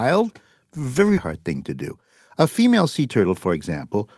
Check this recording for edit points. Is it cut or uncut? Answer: cut